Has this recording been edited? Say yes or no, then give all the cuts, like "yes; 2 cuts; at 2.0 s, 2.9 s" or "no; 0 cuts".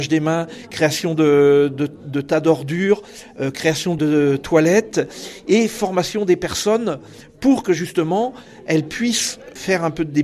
no; 0 cuts